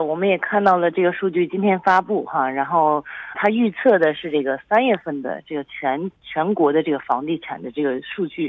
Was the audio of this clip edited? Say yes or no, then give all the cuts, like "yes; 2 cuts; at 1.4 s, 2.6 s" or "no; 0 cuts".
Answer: yes; 1 cut; at 3.3 s